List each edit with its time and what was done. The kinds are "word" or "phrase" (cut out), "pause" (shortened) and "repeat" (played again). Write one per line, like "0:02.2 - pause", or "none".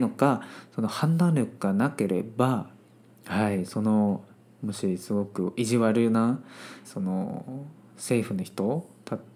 0:02.9 - pause
0:06.8 - phrase